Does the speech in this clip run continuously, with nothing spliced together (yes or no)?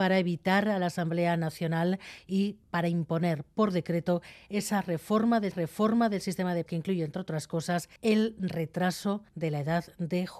no